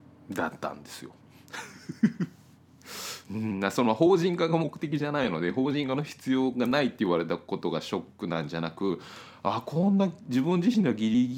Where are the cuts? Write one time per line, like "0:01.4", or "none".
0:03.2